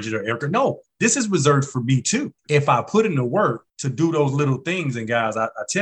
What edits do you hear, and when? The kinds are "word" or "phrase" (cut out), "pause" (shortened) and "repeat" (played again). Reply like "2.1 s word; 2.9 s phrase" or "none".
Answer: 2.4 s pause; 3.7 s pause